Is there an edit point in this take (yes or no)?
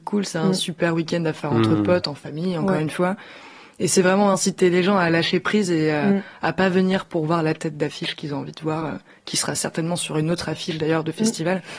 no